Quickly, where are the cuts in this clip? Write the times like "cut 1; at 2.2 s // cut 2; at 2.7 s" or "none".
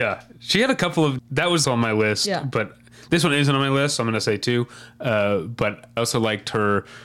cut 1; at 1.2 s // cut 2; at 1.6 s // cut 3; at 6.0 s